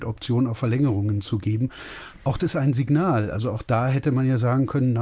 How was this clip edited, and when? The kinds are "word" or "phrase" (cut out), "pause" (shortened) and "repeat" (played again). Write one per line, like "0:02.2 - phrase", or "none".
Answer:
0:02.4 - word